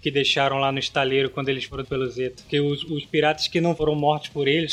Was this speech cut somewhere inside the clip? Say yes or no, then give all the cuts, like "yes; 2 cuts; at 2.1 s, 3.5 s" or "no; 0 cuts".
yes; 1 cut; at 1.8 s